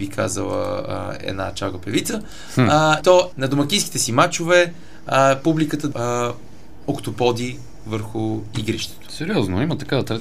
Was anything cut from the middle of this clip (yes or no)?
yes